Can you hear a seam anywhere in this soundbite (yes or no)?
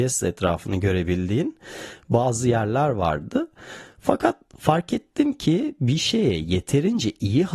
no